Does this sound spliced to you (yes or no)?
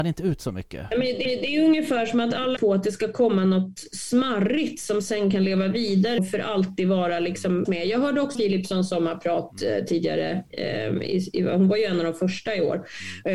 yes